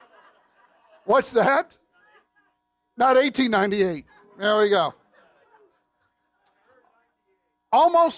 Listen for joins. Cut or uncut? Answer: uncut